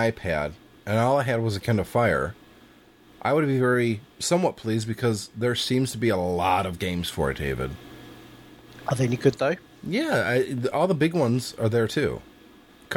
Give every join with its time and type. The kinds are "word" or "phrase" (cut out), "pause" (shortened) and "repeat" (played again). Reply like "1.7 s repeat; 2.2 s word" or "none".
none